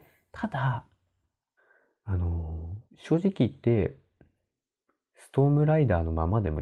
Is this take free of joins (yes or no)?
no